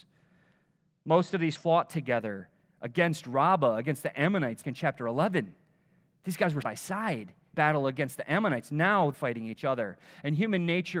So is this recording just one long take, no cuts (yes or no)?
no